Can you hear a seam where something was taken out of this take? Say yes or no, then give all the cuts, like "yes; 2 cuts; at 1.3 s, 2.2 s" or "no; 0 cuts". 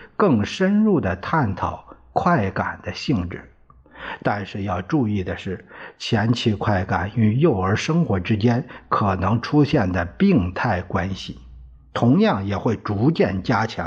no; 0 cuts